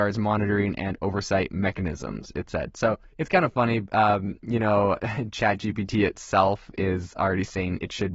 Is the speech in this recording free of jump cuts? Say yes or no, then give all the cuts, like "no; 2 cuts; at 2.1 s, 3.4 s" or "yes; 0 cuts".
no; 1 cut; at 3.1 s